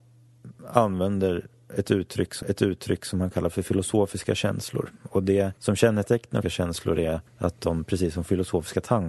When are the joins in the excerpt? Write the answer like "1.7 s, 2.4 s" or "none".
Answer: 2.4 s, 5.6 s, 6.4 s, 7.3 s